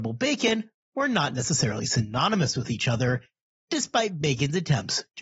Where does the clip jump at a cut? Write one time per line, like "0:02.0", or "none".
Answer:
none